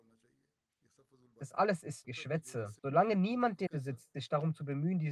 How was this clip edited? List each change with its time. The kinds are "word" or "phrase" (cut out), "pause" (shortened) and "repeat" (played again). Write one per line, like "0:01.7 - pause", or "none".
0:02.0 - word
0:02.8 - pause
0:03.7 - word